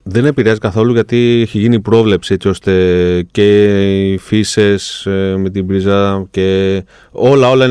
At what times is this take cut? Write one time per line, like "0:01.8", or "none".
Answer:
none